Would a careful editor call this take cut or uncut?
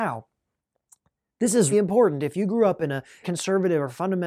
cut